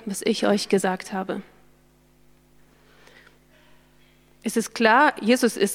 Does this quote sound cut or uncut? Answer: uncut